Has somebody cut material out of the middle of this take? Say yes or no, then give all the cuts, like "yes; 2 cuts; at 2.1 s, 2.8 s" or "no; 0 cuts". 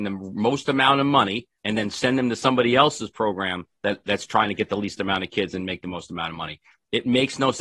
yes; 2 cuts; at 1.6 s, 3.7 s